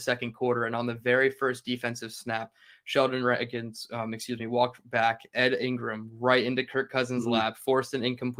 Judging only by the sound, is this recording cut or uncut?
uncut